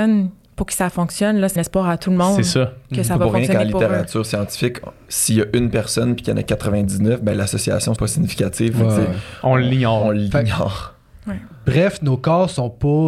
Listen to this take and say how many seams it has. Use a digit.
2